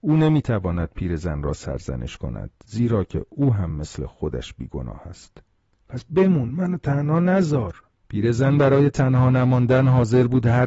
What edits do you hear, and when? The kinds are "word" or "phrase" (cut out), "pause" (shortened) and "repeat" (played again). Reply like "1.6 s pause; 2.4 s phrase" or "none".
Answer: none